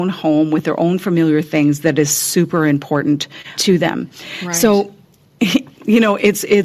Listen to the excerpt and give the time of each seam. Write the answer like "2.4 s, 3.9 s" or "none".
3.6 s